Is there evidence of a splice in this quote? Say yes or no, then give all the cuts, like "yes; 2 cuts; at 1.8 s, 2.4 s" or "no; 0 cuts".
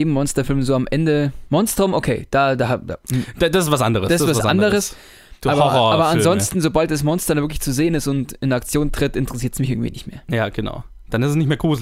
no; 0 cuts